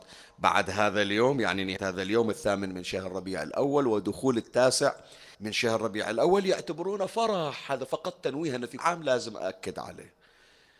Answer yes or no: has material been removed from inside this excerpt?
yes